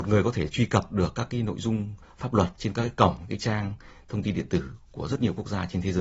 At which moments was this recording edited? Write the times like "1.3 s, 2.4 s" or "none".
none